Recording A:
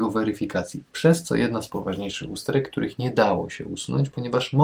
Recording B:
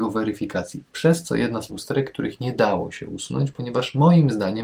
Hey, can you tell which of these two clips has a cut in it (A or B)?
B